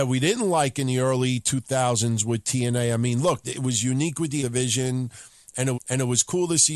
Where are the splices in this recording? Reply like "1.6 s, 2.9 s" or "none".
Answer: 3.4 s, 4.4 s, 5.7 s